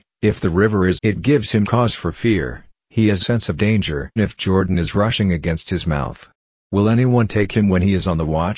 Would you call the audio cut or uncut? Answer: cut